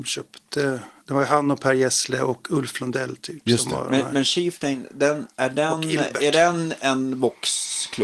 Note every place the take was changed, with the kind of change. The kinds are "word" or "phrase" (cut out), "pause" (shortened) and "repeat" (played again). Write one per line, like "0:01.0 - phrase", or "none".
none